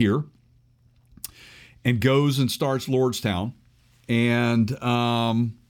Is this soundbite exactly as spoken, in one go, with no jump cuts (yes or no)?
yes